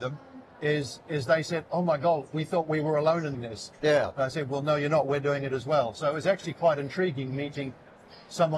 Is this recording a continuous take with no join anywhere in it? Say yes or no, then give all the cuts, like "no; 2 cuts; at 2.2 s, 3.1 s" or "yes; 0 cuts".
no; 1 cut; at 3.3 s